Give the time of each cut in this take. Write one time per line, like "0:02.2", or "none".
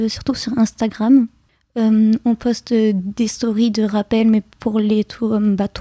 none

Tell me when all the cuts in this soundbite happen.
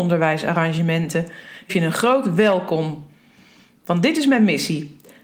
0:01.7

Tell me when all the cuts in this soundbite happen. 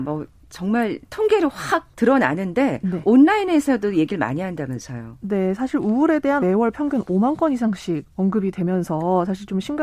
0:01.9
0:06.4

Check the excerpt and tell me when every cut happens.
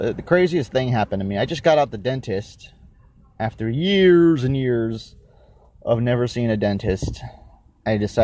none

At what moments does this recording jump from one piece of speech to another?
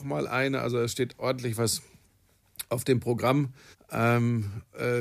0:03.7

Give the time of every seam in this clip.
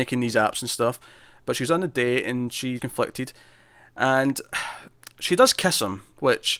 0:02.8

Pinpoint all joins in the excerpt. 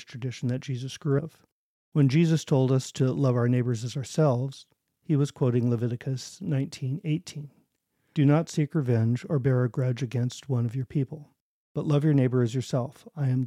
0:01.2

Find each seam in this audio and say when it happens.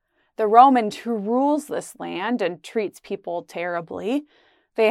0:00.9

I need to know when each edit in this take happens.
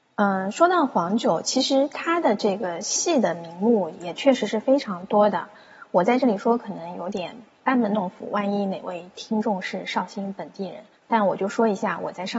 0:11.0

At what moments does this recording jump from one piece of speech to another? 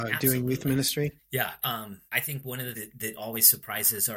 0:01.2
0:02.1
0:02.7

